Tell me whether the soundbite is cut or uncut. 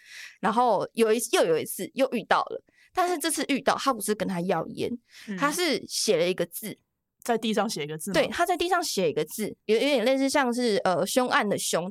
uncut